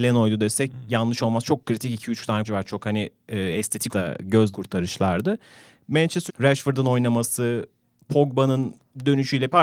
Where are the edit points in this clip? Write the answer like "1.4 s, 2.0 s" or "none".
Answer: 2.4 s, 3.9 s, 4.5 s, 6.3 s